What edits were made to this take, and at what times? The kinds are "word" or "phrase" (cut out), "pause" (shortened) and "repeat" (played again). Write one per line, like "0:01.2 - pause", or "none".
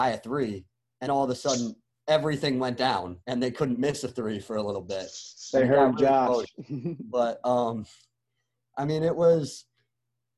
0:01.1 - word
0:03.2 - pause